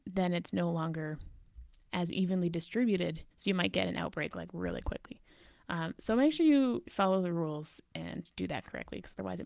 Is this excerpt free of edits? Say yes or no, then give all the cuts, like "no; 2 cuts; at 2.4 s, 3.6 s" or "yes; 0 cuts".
no; 2 cuts; at 3.3 s, 6.9 s